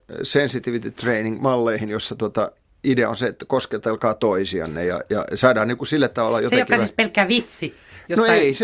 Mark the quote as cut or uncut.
uncut